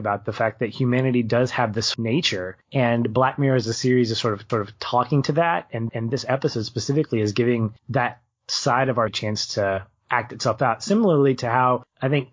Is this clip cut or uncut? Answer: cut